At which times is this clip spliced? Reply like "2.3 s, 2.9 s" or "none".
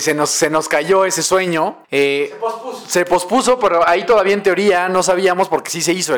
1.8 s